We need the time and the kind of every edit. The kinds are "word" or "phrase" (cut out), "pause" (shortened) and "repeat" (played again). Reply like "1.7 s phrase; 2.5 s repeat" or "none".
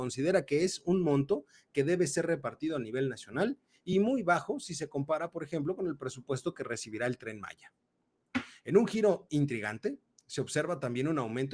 none

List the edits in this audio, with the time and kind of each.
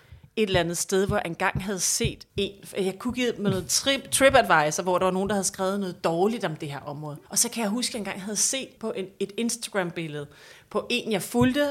2.3 s pause; 7.3 s pause; 8.8 s word

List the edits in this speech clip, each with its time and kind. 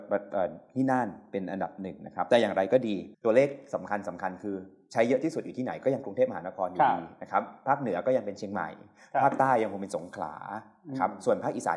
3.1 s pause

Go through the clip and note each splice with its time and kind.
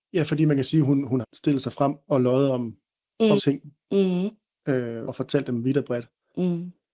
1.2 s phrase; 3.4 s word; 5.1 s word

